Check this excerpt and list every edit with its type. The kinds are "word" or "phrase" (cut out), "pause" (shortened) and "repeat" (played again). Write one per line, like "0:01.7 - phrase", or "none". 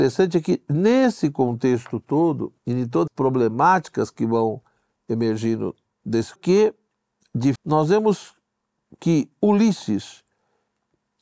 0:02.6 - pause
0:03.1 - phrase
0:06.4 - phrase
0:07.6 - word